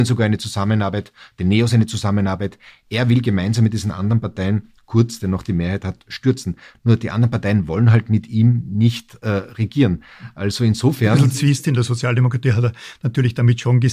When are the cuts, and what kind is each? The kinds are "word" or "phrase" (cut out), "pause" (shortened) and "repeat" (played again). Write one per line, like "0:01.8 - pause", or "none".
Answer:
none

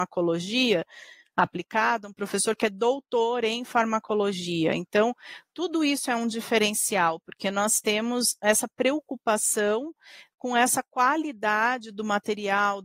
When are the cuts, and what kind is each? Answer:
none

